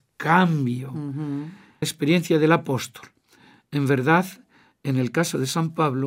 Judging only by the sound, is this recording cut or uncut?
cut